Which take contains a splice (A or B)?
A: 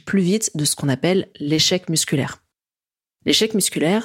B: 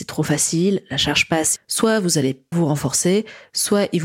B